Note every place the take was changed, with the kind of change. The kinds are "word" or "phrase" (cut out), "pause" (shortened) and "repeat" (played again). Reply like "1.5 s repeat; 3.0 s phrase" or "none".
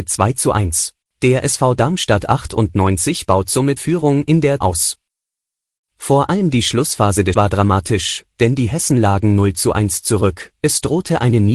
1.0 s pause; 3.8 s word; 4.6 s phrase; 7.3 s word

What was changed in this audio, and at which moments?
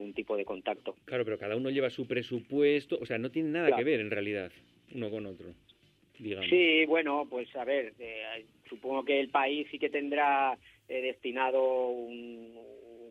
none

